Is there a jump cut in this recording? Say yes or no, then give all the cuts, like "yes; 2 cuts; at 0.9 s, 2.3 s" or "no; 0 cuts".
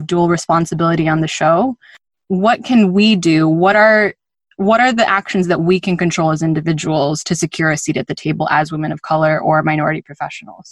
no; 0 cuts